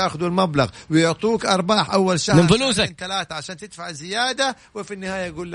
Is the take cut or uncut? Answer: uncut